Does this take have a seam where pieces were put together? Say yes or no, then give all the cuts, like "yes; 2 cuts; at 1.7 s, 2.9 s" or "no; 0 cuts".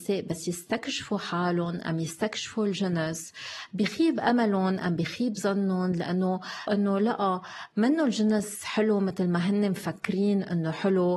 yes; 1 cut; at 6.7 s